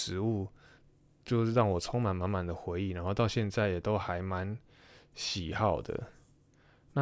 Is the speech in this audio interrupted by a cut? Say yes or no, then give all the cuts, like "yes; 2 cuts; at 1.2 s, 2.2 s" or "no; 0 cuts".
no; 0 cuts